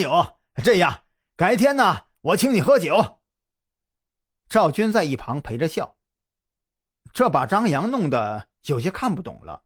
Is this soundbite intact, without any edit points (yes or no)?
yes